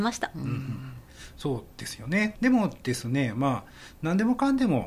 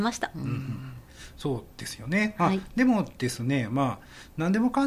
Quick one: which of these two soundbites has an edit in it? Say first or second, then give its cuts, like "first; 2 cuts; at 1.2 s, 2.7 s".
first; 1 cut; at 2.3 s